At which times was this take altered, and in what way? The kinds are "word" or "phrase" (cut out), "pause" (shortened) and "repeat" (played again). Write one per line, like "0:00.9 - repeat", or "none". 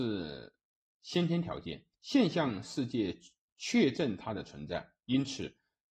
0:01.9 - pause